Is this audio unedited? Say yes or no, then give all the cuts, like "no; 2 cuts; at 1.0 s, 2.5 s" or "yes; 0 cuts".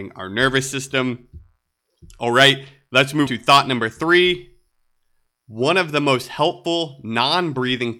no; 1 cut; at 3.3 s